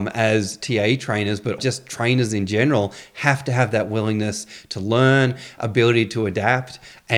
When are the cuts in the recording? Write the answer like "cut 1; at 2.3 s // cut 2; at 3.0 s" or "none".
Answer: cut 1; at 1.6 s